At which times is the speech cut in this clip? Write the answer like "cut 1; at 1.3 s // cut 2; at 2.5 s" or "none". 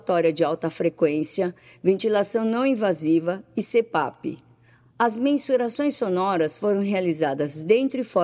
none